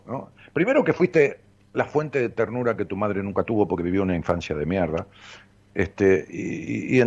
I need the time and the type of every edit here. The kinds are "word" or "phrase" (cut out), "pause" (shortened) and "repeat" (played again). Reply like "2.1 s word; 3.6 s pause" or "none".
none